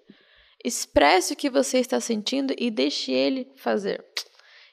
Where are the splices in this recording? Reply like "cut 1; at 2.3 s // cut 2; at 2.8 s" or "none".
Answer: none